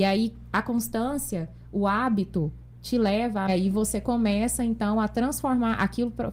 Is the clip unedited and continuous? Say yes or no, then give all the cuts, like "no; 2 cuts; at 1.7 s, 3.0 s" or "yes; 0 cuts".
no; 1 cut; at 3.5 s